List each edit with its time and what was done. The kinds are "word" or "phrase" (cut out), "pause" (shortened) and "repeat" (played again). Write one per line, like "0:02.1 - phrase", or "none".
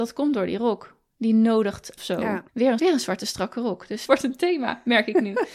0:02.0 - phrase
0:02.5 - pause
0:02.8 - word
0:04.1 - word